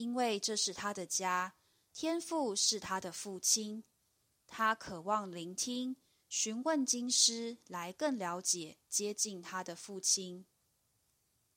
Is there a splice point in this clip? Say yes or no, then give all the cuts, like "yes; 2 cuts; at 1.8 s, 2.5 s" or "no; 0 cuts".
no; 0 cuts